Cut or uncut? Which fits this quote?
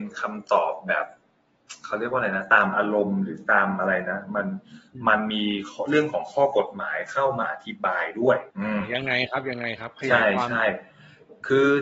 cut